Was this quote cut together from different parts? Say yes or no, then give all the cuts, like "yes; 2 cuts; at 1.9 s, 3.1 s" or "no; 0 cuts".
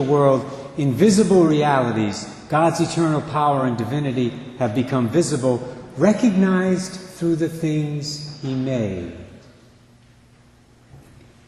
no; 0 cuts